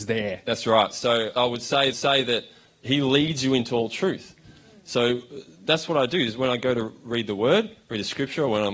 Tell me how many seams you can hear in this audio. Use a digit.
2